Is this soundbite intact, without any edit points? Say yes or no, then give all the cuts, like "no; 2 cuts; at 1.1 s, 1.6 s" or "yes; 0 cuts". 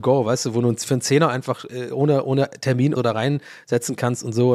no; 1 cut; at 2.9 s